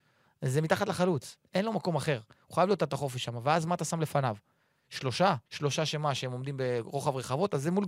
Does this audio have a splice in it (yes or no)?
yes